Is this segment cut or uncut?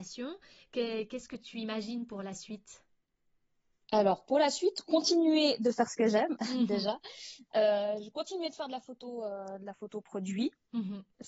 uncut